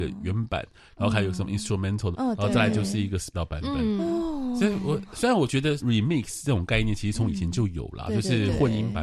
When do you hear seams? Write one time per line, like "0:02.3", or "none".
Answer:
0:02.1
0:03.3
0:05.8